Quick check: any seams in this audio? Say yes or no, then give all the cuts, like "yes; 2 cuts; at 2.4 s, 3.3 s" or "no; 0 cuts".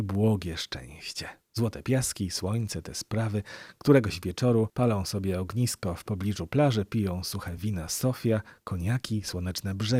no; 0 cuts